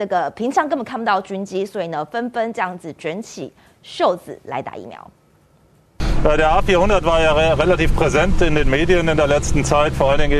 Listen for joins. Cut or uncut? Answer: uncut